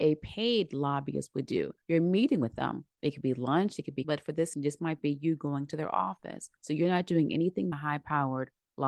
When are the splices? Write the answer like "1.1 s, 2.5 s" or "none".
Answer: 1.8 s, 4.0 s, 4.5 s, 6.6 s, 7.7 s